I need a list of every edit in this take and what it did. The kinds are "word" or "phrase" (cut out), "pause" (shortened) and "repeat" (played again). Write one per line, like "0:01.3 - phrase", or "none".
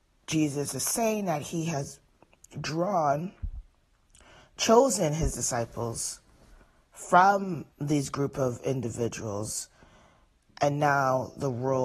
0:07.7 - pause